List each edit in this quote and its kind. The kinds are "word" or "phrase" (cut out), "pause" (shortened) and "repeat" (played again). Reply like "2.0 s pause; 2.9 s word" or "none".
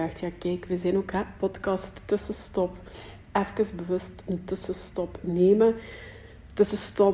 none